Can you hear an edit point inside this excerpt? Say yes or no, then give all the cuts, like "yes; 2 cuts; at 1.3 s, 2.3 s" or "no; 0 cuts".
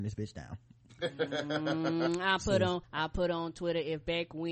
yes; 1 cut; at 2.8 s